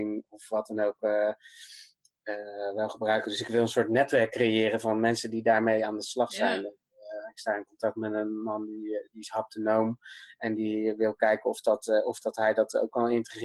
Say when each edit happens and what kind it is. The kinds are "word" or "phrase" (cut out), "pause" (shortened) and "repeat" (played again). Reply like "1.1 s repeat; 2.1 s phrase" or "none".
none